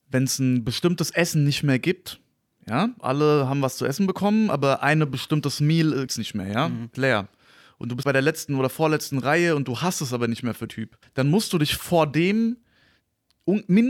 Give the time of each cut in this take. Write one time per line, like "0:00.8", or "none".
0:03.0
0:06.1
0:06.9
0:08.0
0:10.7
0:11.0